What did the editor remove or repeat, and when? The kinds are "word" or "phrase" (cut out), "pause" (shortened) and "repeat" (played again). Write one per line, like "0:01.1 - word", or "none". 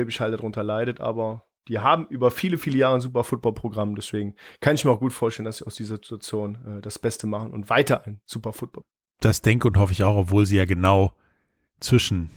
none

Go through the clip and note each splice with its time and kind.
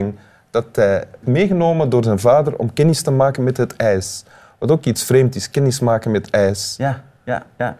0:01.2 - word

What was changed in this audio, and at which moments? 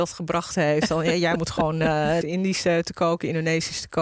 0:02.2 - phrase

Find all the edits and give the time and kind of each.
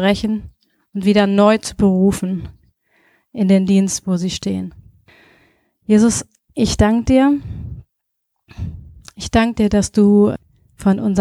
none

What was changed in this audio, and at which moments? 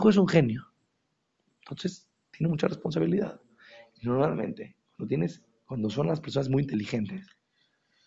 none

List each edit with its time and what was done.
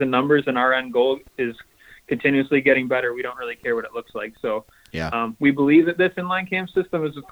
none

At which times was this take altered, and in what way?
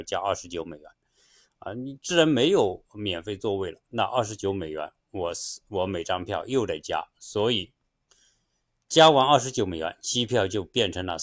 none

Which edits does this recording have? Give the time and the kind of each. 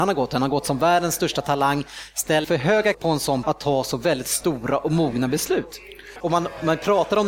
0:02.4 - word
0:02.9 - word
0:03.4 - word

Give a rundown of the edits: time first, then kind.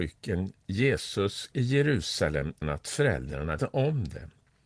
0:01.5 - word
0:02.6 - word
0:03.6 - word

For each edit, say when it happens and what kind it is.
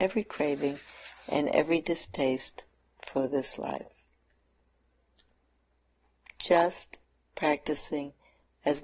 none

